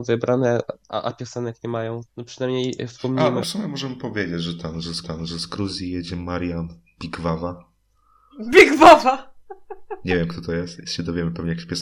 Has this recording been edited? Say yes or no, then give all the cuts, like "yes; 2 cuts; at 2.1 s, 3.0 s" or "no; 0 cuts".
yes; 4 cuts; at 2.1 s, 3.4 s, 5.0 s, 10.8 s